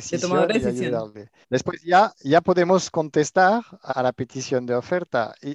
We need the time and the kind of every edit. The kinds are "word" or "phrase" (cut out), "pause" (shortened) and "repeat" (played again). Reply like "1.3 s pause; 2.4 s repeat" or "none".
1.4 s pause; 3.9 s word